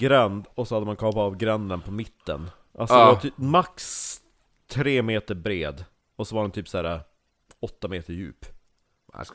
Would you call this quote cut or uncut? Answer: uncut